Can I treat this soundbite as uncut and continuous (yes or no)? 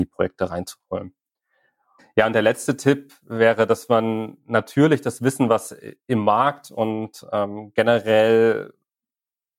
yes